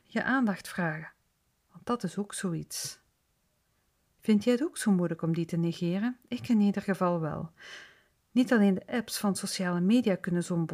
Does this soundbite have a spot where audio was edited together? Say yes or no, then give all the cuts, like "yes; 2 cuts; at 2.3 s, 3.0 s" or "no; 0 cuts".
no; 0 cuts